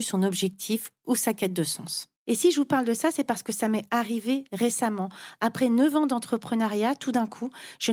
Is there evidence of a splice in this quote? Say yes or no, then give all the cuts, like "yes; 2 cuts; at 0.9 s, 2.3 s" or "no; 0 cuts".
yes; 1 cut; at 2.2 s